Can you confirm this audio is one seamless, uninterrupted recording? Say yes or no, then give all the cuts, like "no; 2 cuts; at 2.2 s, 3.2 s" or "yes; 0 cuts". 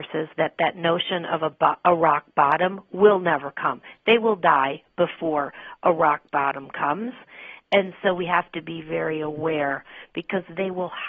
yes; 0 cuts